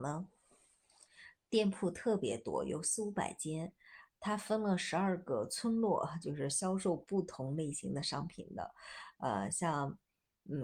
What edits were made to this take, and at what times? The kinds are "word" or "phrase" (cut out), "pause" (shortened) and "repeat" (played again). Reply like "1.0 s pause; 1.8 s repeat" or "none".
none